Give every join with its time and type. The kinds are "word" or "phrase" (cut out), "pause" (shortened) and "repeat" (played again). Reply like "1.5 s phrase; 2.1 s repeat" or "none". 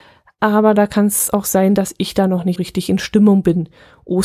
2.6 s word